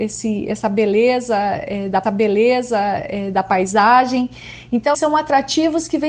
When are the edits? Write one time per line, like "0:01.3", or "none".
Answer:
0:02.0
0:04.9